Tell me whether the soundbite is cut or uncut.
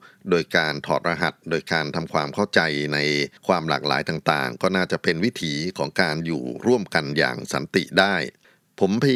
cut